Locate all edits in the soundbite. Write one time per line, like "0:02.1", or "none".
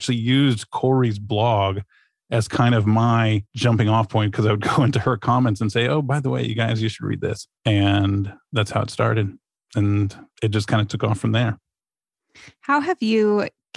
0:07.5